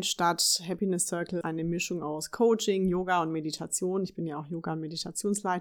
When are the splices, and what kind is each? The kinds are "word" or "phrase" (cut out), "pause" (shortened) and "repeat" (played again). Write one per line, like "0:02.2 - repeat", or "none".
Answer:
0:01.4 - word